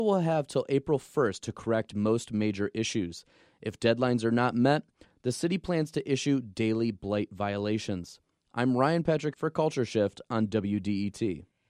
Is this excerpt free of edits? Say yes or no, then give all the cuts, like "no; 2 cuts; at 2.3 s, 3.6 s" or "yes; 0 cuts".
no; 1 cut; at 9.3 s